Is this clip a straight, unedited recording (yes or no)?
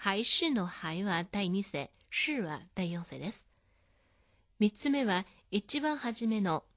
yes